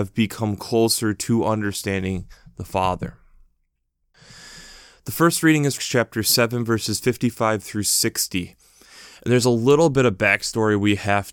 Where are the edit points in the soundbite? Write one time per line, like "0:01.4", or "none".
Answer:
0:05.8